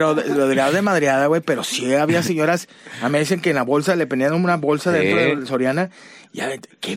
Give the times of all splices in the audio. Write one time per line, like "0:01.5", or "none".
none